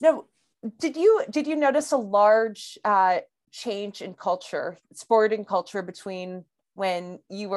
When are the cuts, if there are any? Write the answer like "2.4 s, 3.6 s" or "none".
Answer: none